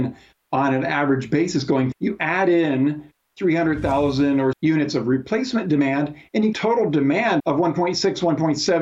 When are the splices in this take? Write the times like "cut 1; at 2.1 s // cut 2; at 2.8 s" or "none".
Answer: cut 1; at 1.9 s // cut 2; at 4.5 s // cut 3; at 6.5 s // cut 4; at 7.4 s